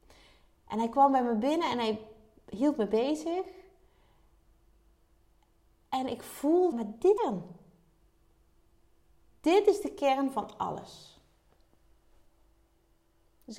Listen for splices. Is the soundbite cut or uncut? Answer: cut